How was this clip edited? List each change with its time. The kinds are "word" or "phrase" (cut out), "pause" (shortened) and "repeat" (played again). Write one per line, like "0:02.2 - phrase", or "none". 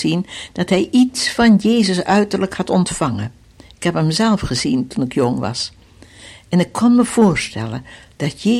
none